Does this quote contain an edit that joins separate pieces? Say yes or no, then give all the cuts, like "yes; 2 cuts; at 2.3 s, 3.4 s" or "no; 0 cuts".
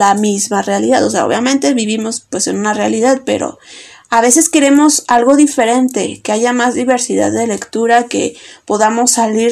no; 0 cuts